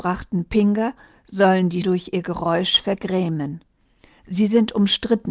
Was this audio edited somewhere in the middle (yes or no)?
yes